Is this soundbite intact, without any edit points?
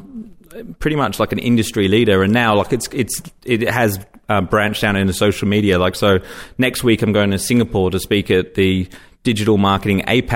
yes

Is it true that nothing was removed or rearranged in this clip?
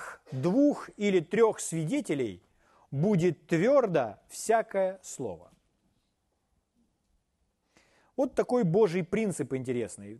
yes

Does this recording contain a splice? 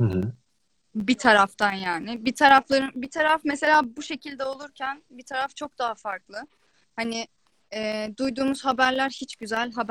no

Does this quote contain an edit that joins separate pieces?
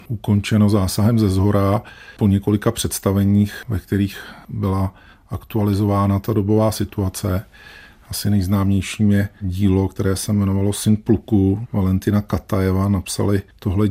yes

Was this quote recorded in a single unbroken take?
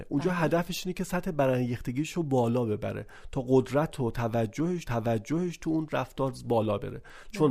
no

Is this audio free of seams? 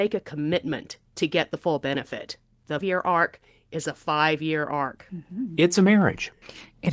no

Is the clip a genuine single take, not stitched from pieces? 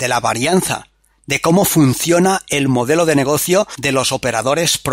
yes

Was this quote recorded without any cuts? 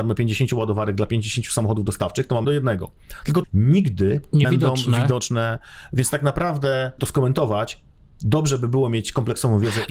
no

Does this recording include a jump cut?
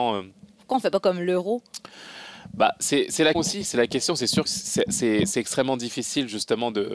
yes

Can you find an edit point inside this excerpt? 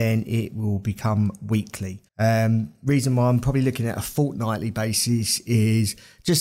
yes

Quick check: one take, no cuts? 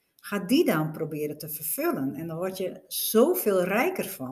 yes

